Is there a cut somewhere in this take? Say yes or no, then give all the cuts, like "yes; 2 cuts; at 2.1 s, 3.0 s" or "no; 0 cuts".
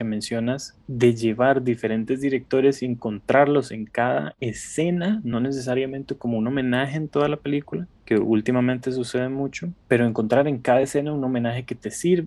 no; 0 cuts